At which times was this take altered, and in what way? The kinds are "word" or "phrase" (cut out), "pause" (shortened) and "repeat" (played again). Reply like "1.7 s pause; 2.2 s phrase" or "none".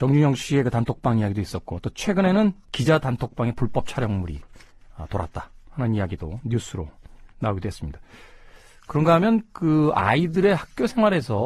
7.3 s pause